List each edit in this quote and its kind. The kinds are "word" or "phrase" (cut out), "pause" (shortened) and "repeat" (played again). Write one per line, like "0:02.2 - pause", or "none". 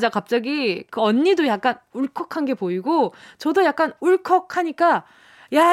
none